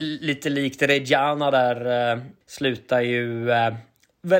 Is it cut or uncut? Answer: cut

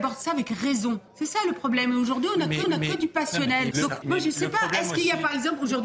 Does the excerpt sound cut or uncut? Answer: cut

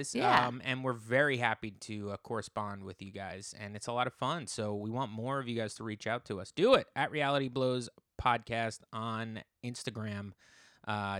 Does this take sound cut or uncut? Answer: uncut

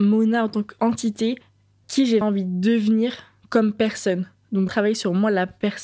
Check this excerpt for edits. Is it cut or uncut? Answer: cut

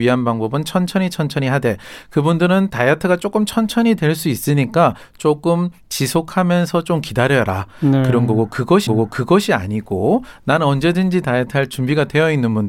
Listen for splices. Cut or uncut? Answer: cut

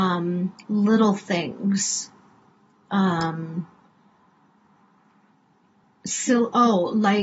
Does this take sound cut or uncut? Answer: uncut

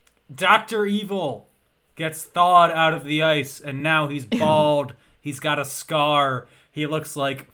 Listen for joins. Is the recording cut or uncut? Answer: uncut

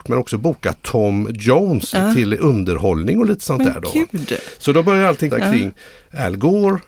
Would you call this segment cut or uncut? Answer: cut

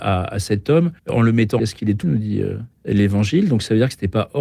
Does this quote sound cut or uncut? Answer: cut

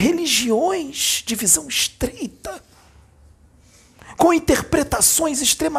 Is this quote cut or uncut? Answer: uncut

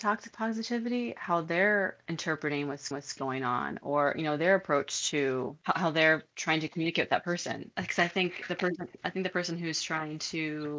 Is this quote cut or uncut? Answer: cut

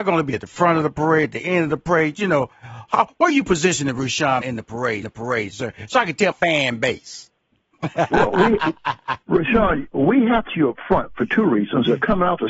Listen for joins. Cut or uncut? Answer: cut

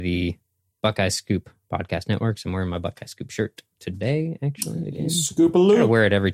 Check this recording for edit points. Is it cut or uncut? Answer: uncut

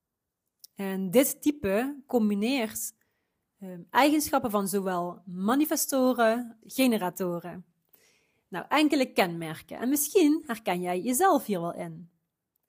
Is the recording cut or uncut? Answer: cut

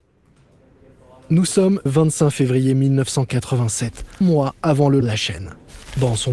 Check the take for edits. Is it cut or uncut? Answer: cut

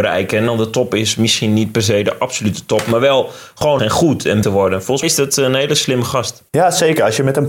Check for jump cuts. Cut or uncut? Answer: cut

